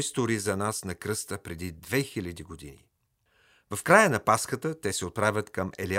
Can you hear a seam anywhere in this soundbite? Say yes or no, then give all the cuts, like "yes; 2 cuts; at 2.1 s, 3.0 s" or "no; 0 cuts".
no; 0 cuts